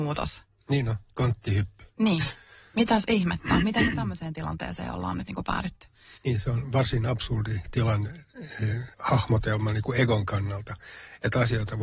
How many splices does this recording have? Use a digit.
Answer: 3